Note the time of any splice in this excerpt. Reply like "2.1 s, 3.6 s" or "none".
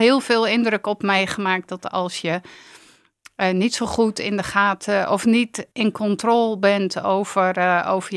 5.7 s